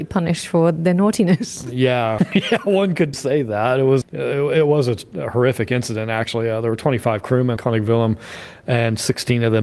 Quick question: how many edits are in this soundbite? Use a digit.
4